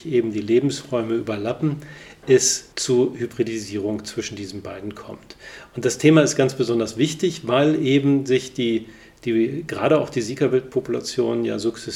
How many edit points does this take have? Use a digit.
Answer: 1